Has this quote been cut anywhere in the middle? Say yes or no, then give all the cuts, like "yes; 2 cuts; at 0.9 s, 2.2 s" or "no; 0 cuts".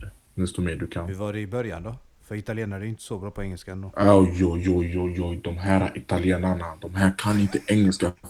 no; 0 cuts